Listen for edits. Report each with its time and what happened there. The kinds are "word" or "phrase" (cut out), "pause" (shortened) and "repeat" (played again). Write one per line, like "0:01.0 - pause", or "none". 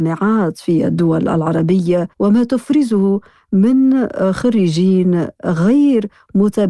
0:02.1 - pause